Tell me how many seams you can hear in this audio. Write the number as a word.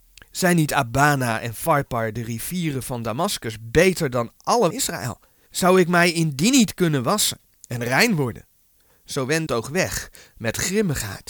two